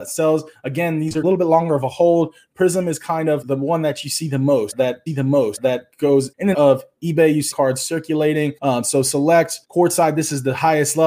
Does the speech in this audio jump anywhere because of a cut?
yes; 6 cuts; at 3.4 s, 5.1 s, 6.5 s, 7.5 s, 8.6 s, 9.6 s

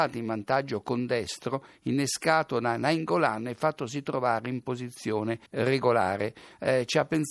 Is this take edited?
yes; 1 cut; at 5.5 s

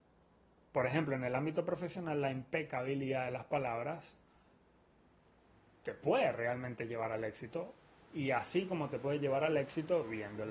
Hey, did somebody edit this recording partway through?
no; 0 cuts

